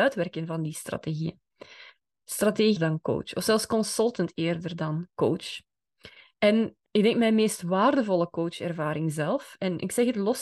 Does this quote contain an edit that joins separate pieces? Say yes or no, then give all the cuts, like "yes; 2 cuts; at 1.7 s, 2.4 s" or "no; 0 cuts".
yes; 2 cuts; at 2.8 s, 6.9 s